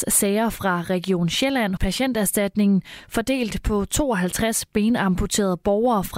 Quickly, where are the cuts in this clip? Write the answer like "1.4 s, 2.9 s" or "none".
1.8 s